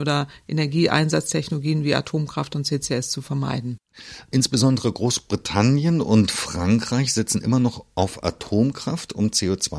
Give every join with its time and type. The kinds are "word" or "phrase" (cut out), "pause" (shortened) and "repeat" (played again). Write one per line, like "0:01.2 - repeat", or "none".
none